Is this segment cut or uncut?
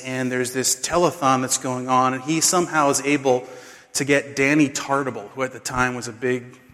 uncut